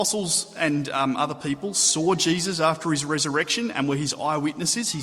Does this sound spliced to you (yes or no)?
no